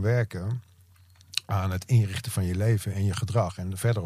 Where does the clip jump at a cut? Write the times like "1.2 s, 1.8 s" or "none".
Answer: none